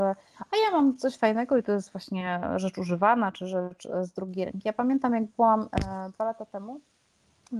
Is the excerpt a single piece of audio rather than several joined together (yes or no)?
yes